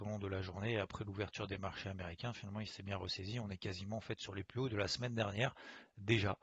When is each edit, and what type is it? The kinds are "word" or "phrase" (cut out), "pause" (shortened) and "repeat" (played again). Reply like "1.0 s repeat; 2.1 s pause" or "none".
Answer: none